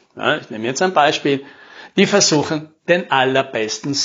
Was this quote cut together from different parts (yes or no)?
no